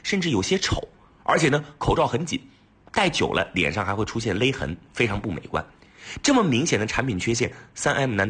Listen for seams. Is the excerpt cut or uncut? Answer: uncut